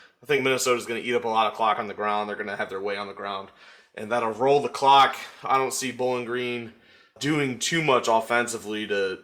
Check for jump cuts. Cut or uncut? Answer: uncut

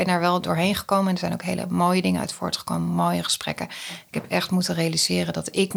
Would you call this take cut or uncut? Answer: uncut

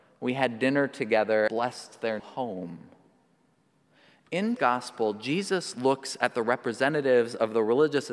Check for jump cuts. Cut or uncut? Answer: cut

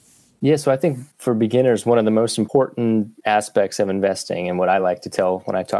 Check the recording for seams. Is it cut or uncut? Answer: uncut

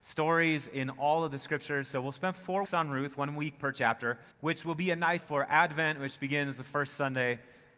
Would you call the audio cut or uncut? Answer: cut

